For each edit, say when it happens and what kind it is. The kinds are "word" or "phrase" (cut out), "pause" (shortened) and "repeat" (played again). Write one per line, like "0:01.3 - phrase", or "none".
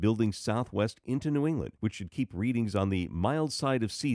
0:01.8 - pause